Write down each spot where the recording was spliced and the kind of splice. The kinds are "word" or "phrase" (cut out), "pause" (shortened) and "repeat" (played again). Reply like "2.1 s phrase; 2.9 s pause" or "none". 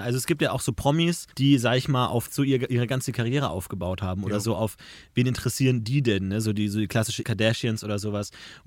1.3 s pause; 2.3 s word; 7.2 s word